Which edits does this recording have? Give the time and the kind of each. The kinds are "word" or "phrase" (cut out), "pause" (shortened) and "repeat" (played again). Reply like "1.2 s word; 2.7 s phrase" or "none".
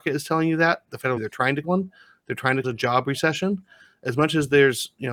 1.2 s phrase; 1.6 s word; 2.6 s word